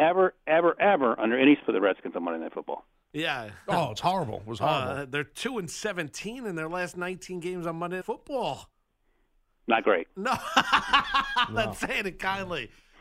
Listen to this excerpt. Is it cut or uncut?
cut